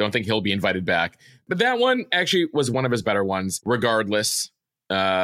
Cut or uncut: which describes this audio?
uncut